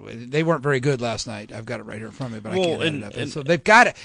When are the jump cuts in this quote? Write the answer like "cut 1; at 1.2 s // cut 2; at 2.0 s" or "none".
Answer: none